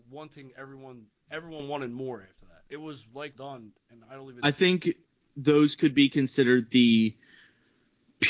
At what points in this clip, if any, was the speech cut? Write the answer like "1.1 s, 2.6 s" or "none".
2.7 s, 3.3 s, 4.4 s